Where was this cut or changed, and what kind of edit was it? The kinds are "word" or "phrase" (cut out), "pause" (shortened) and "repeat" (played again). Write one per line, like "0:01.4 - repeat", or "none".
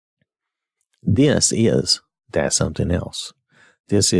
none